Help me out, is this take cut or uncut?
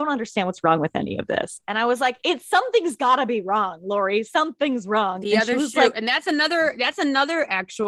uncut